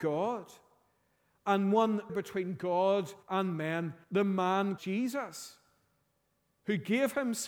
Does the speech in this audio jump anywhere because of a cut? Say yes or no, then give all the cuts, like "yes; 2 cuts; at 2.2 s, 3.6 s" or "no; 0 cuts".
yes; 4 cuts; at 2.1 s, 3.2 s, 4.0 s, 4.8 s